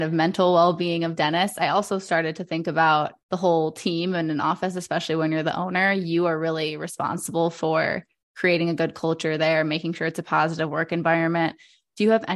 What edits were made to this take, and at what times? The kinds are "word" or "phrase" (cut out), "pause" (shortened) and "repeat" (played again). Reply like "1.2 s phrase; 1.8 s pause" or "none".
3.2 s pause